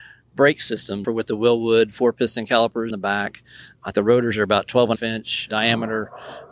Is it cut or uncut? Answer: cut